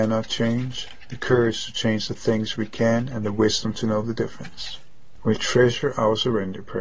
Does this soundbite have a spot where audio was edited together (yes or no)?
no